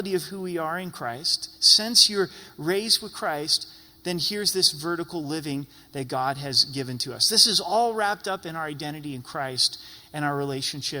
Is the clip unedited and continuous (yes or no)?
yes